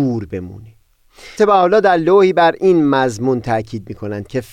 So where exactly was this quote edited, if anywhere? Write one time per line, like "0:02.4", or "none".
0:01.4